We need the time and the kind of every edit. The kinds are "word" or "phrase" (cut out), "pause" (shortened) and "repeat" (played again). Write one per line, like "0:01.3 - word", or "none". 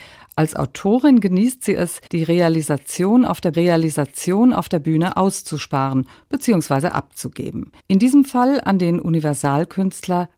0:02.1 - pause
0:03.5 - repeat
0:07.8 - pause